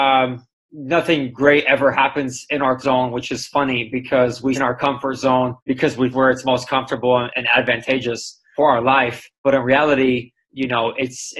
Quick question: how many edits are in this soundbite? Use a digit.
8